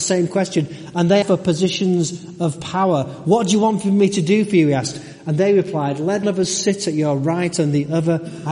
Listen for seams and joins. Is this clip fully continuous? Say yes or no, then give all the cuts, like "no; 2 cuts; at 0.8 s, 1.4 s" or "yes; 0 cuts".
no; 2 cuts; at 1.2 s, 6.2 s